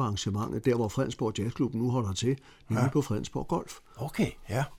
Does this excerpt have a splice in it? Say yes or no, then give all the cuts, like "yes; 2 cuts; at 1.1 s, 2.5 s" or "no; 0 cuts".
no; 0 cuts